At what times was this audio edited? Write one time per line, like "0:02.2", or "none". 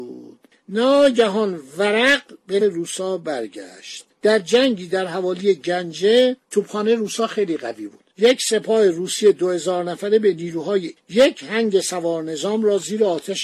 0:02.6
0:04.1
0:06.4
0:11.0